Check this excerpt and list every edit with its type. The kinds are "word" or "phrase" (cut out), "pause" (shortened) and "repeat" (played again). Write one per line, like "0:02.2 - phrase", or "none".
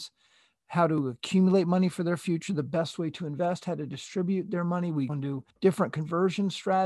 0:05.1 - word
0:05.5 - pause